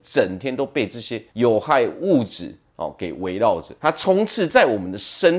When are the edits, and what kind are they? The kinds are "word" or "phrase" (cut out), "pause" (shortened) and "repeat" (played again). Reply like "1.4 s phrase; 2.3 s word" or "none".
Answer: 1.3 s pause; 3.8 s pause